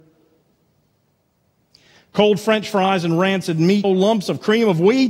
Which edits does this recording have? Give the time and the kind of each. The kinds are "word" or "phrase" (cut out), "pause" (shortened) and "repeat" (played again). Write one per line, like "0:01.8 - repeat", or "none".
0:03.8 - word